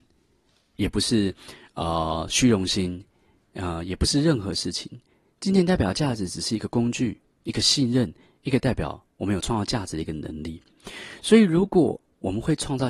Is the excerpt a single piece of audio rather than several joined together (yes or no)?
yes